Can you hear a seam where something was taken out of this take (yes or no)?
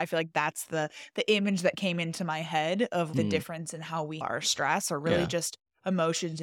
yes